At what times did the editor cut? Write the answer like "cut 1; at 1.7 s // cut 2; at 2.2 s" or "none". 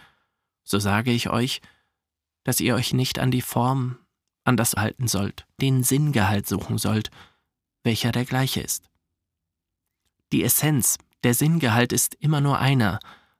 cut 1; at 4.8 s // cut 2; at 5.6 s